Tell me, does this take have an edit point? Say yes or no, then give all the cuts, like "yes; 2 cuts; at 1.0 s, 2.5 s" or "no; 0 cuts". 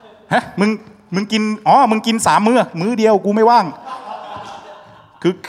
no; 0 cuts